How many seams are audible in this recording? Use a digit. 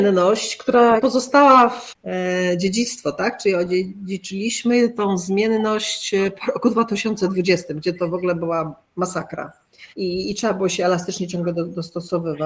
2